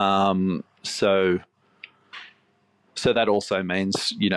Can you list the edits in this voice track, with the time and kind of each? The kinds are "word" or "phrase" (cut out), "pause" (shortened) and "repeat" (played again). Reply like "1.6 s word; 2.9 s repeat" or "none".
none